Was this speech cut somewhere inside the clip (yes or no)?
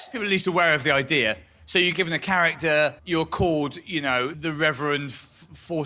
yes